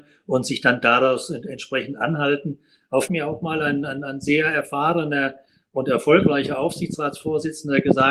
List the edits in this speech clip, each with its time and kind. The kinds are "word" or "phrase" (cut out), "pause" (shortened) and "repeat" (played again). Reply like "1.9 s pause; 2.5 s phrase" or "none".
3.1 s phrase

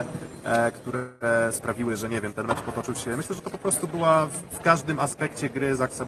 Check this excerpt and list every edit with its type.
none

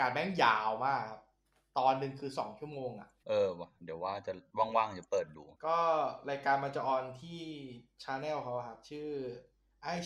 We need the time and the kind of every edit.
5.6 s pause

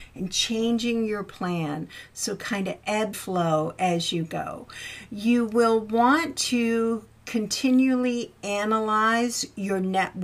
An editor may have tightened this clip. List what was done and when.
3.1 s word

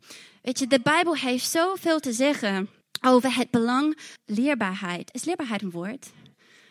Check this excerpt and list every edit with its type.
2.8 s pause; 4.2 s word

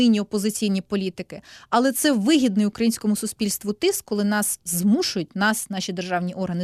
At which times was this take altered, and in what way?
none

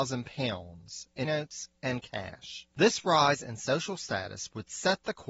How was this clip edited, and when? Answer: 1.2 s phrase; 2.7 s pause

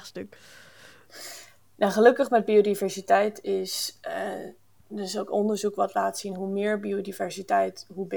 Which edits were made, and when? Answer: none

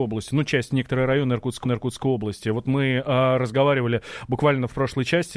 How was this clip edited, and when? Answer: 1.6 s repeat

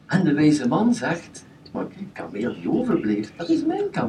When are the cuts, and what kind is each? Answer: 1.7 s word; 2.1 s word

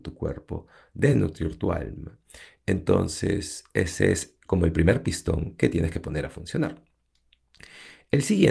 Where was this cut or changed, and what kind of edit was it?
none

